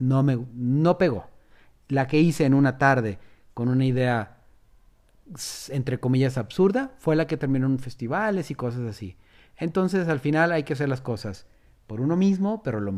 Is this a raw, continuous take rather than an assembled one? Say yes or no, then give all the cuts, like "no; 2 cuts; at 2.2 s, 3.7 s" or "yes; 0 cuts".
yes; 0 cuts